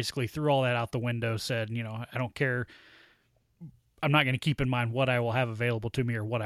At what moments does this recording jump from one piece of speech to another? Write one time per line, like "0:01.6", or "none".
none